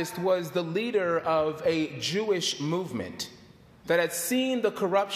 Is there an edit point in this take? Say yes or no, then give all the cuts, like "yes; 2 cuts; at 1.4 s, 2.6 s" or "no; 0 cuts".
no; 0 cuts